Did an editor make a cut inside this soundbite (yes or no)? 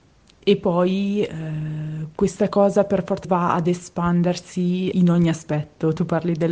yes